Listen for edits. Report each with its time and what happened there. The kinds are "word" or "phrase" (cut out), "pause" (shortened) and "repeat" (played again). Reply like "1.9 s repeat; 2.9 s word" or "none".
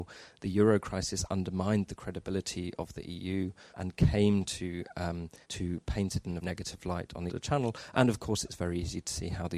3.7 s word; 5.4 s pause; 6.4 s word; 7.3 s phrase